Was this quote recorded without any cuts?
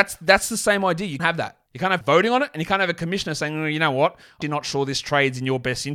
no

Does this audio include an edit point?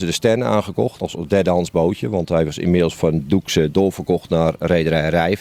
yes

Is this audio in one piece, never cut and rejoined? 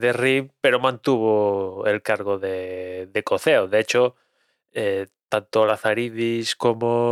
yes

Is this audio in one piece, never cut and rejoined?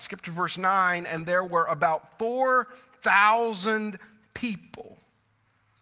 yes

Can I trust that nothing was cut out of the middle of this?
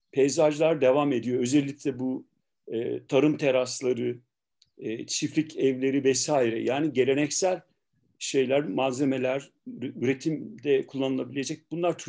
yes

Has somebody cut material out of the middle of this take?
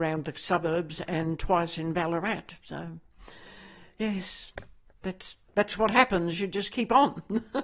yes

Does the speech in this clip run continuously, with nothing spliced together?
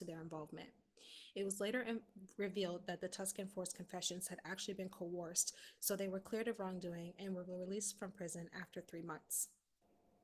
yes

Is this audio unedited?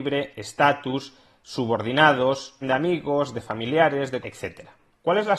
no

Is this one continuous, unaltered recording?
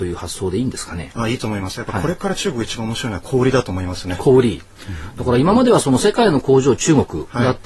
yes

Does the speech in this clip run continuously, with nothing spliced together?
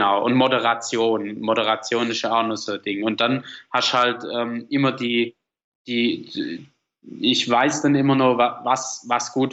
yes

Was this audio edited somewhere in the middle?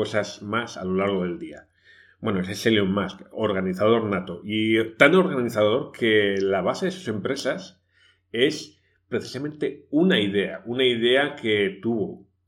no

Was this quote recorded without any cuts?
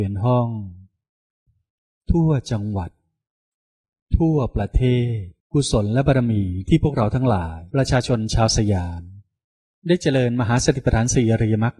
no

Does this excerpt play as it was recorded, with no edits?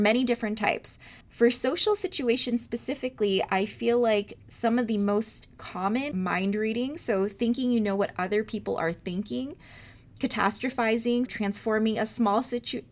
no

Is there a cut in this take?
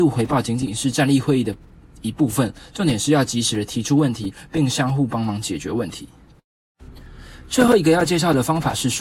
no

